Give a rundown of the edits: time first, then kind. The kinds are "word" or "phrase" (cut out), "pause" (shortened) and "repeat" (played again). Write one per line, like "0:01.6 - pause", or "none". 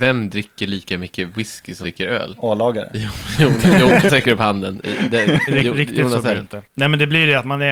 0:01.8 - word
0:04.1 - word
0:05.5 - word
0:06.7 - pause